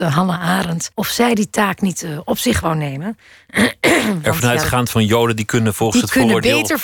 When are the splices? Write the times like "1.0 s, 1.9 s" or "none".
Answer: 0.9 s, 4.9 s